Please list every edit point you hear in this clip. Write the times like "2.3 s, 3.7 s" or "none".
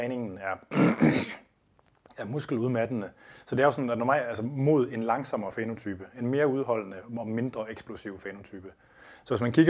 none